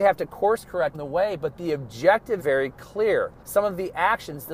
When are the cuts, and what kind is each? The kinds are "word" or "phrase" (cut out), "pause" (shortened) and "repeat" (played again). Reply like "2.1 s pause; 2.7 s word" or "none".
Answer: 0.9 s word; 2.4 s word; 3.4 s pause